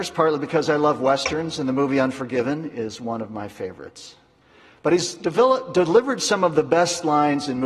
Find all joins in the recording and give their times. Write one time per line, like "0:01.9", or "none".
none